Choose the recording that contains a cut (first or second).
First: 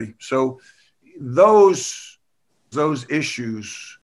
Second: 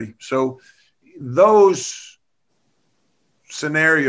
first